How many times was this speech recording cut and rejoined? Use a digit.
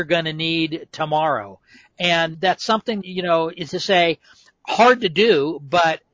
3